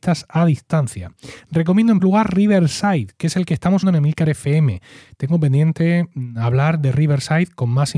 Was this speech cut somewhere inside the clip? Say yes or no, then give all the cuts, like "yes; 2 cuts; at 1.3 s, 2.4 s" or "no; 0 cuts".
yes; 2 cuts; at 2.0 s, 3.8 s